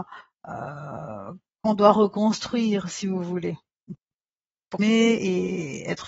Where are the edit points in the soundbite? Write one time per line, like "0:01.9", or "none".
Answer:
0:04.8